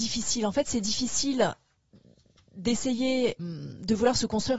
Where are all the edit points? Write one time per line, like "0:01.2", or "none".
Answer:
0:03.4